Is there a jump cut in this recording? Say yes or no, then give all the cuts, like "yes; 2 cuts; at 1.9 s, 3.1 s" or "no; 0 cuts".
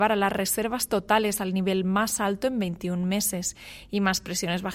no; 0 cuts